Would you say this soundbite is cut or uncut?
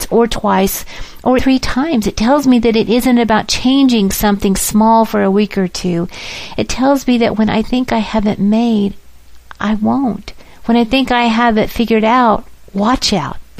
cut